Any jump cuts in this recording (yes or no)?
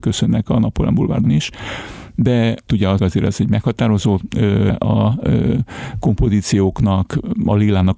yes